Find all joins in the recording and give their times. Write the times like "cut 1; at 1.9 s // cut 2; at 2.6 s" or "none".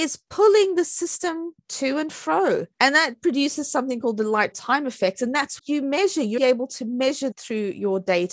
cut 1; at 2.7 s // cut 2; at 4.5 s // cut 3; at 5.6 s // cut 4; at 6.4 s // cut 5; at 7.3 s